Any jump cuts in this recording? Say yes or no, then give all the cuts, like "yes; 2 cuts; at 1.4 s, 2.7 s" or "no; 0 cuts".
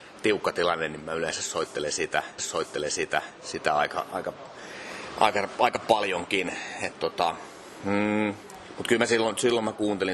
yes; 1 cut; at 2.4 s